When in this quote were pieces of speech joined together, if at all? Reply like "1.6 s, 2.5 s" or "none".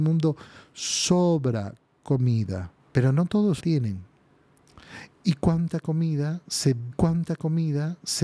2.8 s, 3.6 s, 6.9 s